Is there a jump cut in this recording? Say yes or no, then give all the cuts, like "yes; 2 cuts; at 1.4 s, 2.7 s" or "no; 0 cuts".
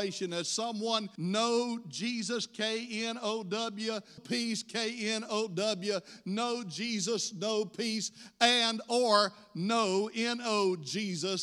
yes; 2 cuts; at 1.2 s, 4.2 s